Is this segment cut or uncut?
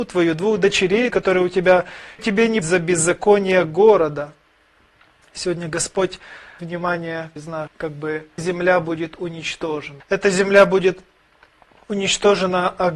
cut